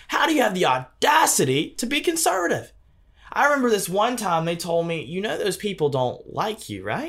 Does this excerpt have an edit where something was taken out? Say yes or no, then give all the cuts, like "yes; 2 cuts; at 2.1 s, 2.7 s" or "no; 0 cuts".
no; 0 cuts